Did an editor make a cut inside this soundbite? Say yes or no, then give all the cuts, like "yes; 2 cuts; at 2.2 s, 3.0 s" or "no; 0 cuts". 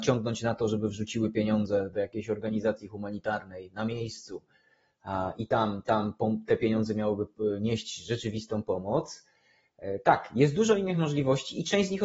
no; 0 cuts